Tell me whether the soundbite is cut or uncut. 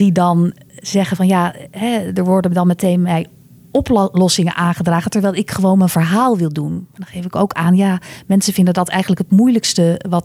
uncut